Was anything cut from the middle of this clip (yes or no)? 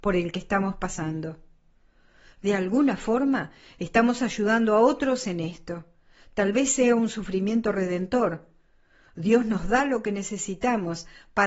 no